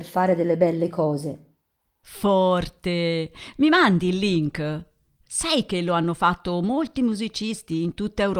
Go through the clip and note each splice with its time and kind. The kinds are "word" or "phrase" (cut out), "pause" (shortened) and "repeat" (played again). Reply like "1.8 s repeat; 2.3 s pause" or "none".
none